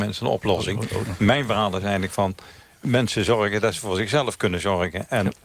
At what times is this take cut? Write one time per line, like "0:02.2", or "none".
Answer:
none